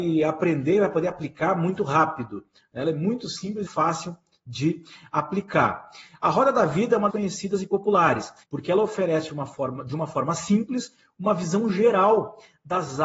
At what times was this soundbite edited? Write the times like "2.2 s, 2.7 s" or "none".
3.7 s, 7.1 s, 8.4 s